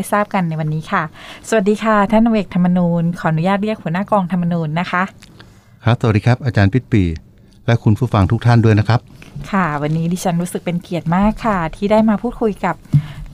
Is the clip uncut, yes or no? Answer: yes